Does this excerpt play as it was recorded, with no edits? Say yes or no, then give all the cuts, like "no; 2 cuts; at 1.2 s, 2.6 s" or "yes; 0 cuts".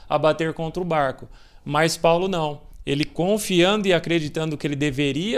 yes; 0 cuts